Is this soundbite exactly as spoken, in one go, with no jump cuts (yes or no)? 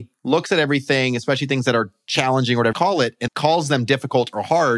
no